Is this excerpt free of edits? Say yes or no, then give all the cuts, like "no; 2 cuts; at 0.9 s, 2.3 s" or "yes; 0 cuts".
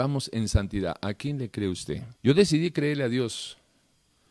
no; 1 cut; at 2.2 s